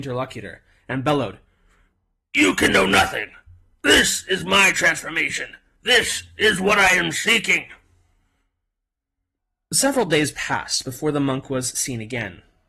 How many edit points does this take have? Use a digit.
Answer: 0